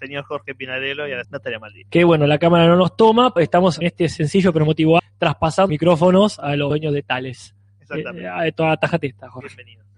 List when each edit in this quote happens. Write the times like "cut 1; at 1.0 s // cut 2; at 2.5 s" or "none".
cut 1; at 1.2 s // cut 2; at 3.4 s // cut 3; at 3.8 s // cut 4; at 5.0 s // cut 5; at 5.7 s // cut 6; at 6.7 s